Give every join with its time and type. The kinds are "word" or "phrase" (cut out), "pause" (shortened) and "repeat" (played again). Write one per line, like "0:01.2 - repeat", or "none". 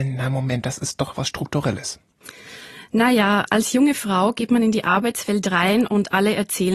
none